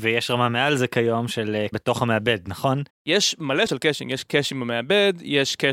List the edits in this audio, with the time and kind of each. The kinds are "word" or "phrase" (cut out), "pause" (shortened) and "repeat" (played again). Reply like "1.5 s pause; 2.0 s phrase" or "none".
1.7 s phrase; 2.9 s pause; 3.7 s word

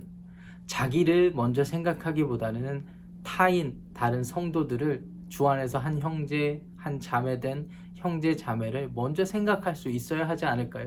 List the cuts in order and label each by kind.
none

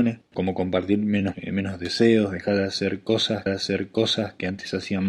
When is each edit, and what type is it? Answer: 1.3 s word; 3.5 s repeat

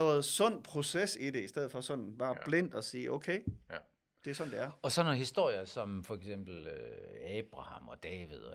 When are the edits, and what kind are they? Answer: none

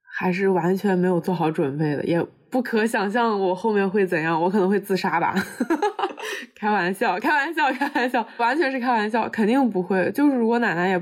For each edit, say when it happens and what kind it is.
8.4 s word

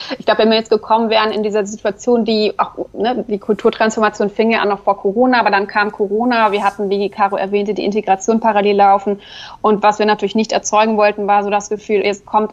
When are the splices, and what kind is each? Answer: none

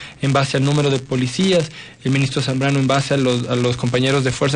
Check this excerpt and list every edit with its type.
none

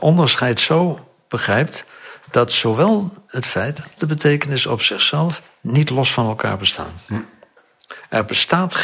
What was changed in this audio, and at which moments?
4.0 s word

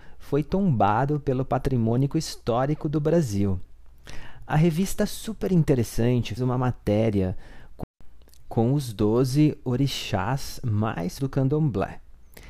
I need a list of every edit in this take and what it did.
6.4 s word; 11.2 s word

